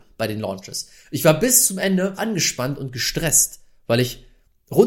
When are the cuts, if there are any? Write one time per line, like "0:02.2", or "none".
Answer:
0:02.2